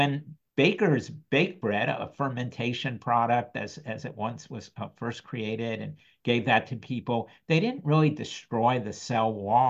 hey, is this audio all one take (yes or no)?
yes